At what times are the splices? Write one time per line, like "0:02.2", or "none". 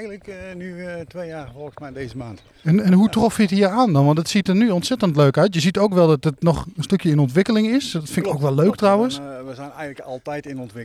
none